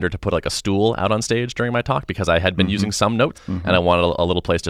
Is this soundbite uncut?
no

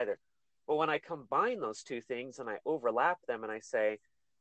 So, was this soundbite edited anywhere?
no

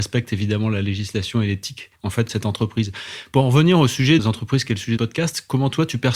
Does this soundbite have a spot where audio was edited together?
yes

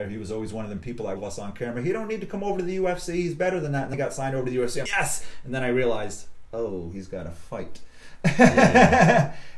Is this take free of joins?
no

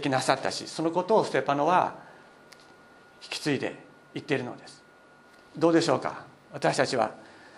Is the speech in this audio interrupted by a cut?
no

